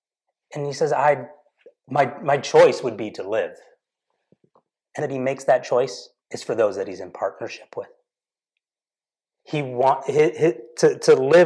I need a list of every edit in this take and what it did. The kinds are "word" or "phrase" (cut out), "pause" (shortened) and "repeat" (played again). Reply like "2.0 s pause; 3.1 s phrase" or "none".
1.8 s pause; 5.0 s phrase; 6.2 s pause